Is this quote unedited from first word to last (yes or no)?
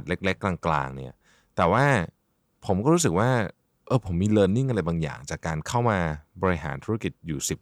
yes